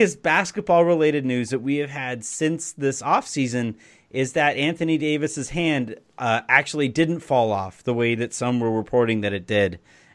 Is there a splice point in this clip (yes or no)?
no